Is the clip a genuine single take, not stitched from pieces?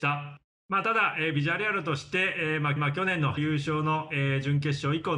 no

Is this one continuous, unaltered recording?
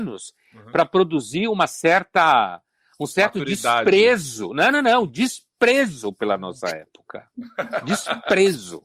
yes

